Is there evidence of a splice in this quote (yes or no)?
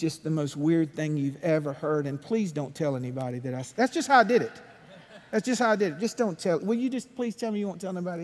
no